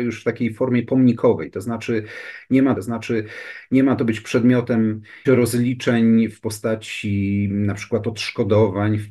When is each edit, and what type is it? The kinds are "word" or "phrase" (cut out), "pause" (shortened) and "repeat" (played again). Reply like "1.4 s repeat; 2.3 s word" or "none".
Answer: 2.8 s repeat; 5.2 s word